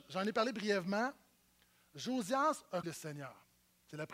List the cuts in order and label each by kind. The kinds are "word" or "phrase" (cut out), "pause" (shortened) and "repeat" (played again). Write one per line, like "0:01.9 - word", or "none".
0:02.8 - word